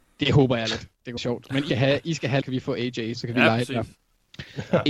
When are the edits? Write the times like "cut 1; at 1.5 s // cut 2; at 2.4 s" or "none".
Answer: cut 1; at 1.2 s // cut 2; at 1.7 s // cut 3; at 2.4 s // cut 4; at 3.1 s